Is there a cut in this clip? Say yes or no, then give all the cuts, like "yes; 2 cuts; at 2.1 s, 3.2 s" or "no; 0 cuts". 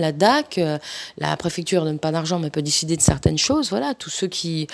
no; 0 cuts